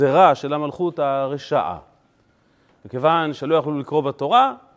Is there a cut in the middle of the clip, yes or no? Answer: no